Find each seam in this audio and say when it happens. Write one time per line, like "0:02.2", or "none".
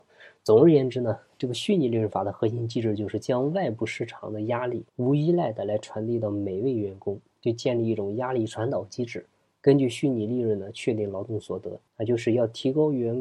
0:04.9
0:11.9